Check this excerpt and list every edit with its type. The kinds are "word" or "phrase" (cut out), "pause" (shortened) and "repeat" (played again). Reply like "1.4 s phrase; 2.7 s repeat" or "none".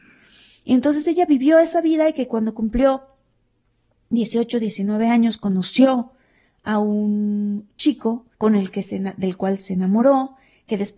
8.3 s pause